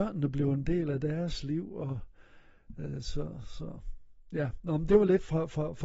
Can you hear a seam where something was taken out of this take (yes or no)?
no